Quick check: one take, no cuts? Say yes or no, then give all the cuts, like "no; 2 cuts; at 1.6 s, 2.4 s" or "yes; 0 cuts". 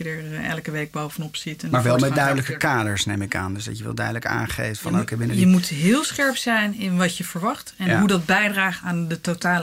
yes; 0 cuts